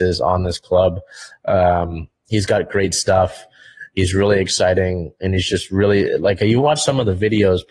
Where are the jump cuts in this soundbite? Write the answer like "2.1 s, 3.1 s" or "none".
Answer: none